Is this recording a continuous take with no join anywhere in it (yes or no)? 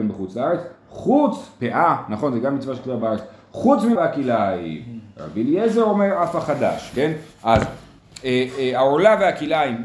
no